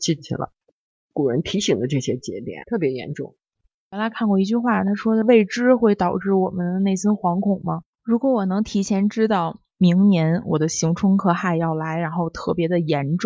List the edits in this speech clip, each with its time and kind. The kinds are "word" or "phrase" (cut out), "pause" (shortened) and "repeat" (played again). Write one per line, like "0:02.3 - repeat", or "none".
0:02.6 - word